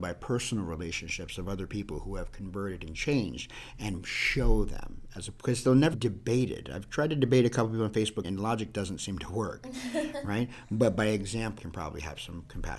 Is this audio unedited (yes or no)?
no